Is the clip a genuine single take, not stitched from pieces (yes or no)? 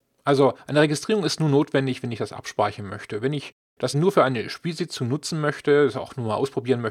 no